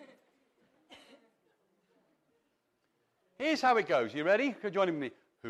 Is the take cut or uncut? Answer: uncut